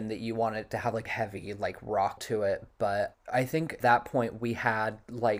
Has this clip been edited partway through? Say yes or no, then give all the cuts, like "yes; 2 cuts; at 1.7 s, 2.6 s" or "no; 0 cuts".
yes; 4 cuts; at 1.1 s, 2.2 s, 3.1 s, 3.8 s